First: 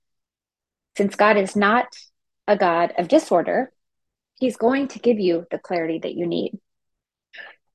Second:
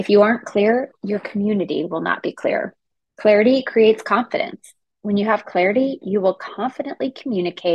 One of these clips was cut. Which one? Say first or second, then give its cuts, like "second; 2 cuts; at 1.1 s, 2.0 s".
second; 1 cut; at 2.9 s